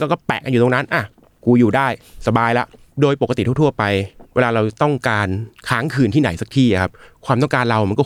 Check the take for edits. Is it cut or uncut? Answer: uncut